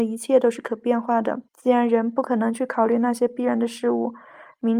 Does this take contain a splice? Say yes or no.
yes